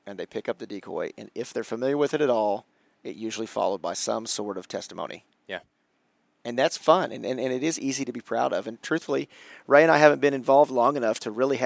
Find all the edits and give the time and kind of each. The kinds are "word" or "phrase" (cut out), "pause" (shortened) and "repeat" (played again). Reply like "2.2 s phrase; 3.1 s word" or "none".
none